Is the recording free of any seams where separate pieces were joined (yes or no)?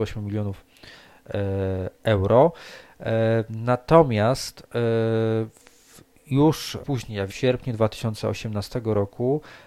no